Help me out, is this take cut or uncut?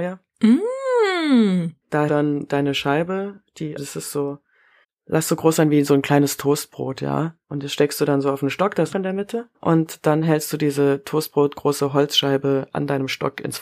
cut